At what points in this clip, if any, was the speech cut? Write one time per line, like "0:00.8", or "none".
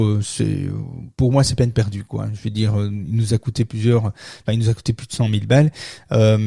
none